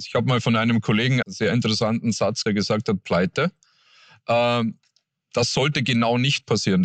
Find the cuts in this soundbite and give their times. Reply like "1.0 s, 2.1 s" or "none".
1.2 s, 2.5 s, 3.0 s